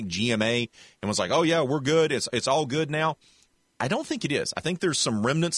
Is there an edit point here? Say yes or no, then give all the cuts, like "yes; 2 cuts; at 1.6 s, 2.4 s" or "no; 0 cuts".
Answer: no; 0 cuts